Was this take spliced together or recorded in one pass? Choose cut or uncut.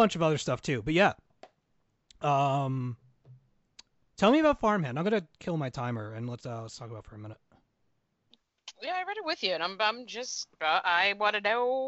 cut